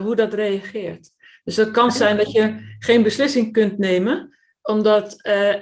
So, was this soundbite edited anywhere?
no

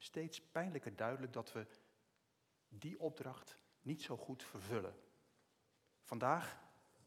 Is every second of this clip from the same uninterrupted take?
yes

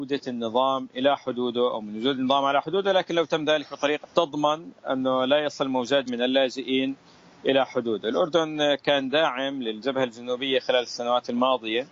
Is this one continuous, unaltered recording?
no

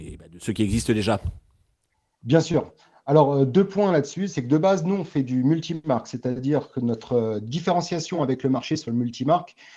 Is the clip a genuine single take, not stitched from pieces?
yes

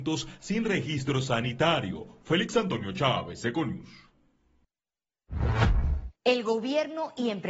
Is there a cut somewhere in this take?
yes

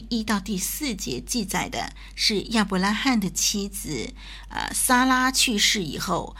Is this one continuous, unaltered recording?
yes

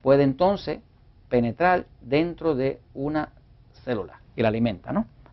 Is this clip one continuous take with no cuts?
yes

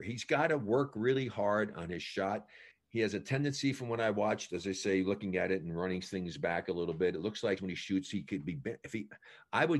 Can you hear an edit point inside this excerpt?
yes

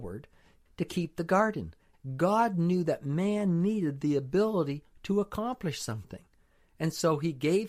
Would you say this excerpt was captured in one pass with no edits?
yes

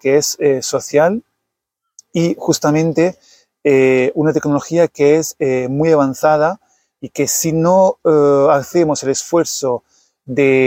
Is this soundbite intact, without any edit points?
yes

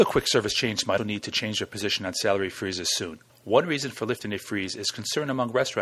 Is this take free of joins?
no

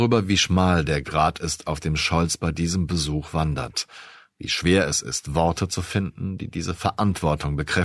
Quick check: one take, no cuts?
yes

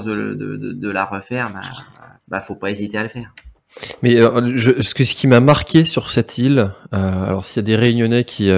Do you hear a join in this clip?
yes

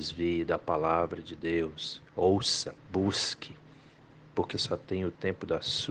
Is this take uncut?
no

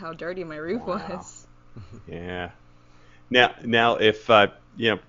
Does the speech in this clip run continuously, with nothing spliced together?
yes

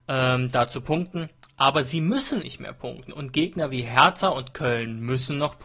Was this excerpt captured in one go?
no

